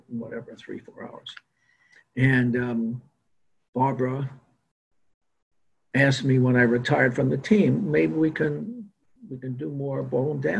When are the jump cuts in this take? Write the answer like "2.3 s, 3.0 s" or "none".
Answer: none